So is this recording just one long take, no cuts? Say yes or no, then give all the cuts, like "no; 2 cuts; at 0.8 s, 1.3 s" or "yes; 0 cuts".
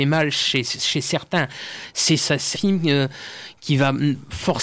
no; 2 cuts; at 2.2 s, 2.5 s